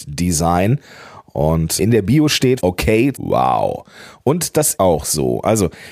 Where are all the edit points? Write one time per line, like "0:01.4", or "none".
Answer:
0:01.8
0:02.6
0:03.1
0:04.7